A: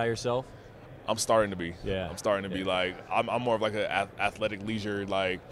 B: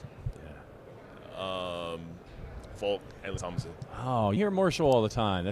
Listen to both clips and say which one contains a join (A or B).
B